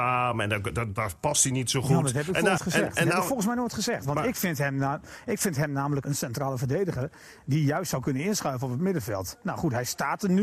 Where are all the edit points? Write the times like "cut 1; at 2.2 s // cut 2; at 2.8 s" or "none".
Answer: cut 1; at 2.6 s // cut 2; at 6.0 s